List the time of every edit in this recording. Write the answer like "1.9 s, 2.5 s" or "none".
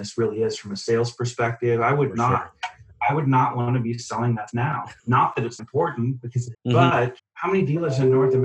4.5 s, 5.0 s, 5.6 s, 6.5 s, 7.2 s